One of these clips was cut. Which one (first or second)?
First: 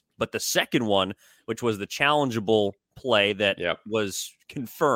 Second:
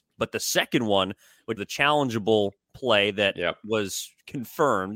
second